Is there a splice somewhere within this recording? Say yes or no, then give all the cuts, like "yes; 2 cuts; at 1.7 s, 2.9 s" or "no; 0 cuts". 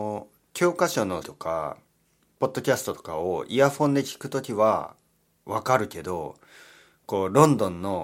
yes; 1 cut; at 1.2 s